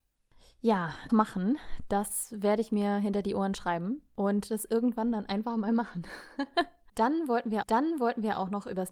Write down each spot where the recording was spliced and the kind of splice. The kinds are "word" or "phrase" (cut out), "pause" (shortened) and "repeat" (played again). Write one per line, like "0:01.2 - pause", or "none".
0:01.1 - word
0:07.6 - repeat